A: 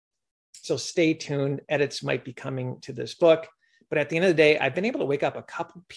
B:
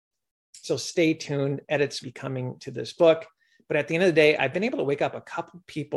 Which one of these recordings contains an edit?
B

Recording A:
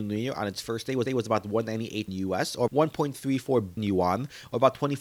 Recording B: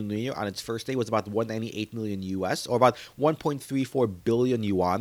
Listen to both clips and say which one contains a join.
A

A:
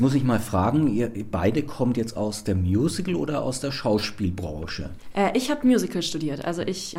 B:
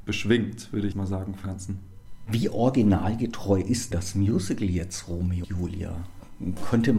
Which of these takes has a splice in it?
B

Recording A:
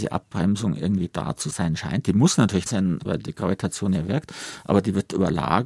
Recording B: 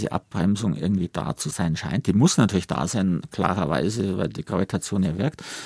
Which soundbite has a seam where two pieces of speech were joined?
A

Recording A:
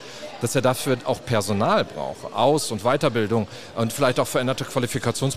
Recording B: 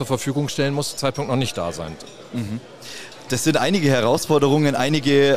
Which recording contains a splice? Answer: B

